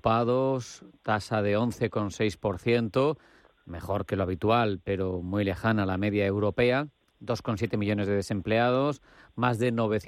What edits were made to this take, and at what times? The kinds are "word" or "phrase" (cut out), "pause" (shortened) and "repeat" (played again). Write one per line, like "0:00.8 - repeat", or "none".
none

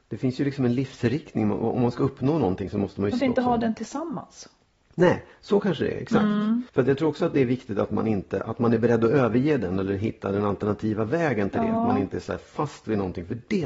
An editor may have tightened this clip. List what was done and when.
0:03.2 - phrase
0:06.7 - pause

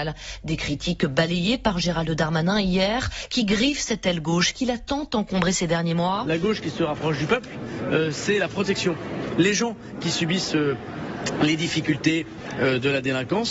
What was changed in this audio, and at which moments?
none

